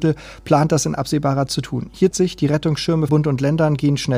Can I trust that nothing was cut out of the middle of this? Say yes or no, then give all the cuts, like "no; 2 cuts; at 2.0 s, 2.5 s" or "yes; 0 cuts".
no; 3 cuts; at 1.5 s, 2.1 s, 3.1 s